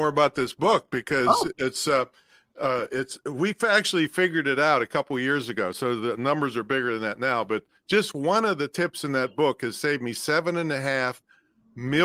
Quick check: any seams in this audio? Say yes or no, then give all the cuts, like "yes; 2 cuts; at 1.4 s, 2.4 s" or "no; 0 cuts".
no; 0 cuts